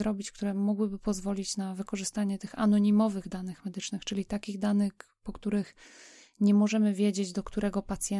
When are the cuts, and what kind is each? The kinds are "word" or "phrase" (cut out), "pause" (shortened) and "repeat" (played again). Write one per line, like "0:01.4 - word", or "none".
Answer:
none